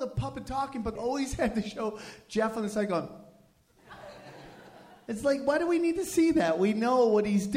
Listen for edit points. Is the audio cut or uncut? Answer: cut